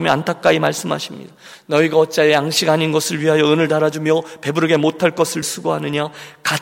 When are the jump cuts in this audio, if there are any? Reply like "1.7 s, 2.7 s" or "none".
5.4 s

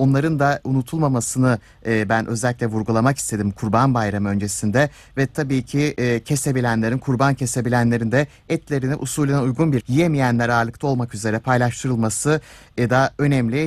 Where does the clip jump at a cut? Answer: 9.8 s

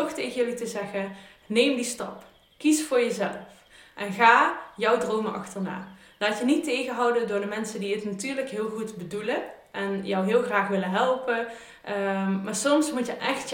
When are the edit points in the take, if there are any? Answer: none

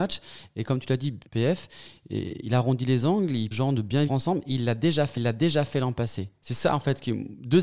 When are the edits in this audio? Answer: 1.3 s, 3.5 s, 4.1 s, 5.2 s

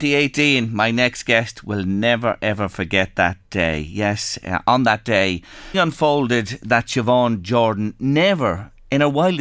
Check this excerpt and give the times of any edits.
5.7 s

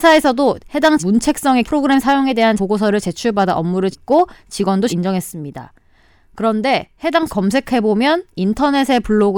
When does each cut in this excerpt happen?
1.0 s, 1.6 s, 2.6 s, 3.9 s, 4.9 s, 7.3 s

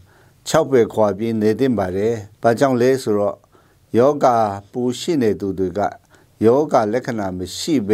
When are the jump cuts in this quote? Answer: 2.3 s

